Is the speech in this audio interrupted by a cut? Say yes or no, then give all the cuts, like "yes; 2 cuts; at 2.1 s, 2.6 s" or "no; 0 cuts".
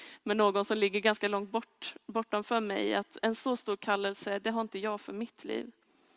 no; 0 cuts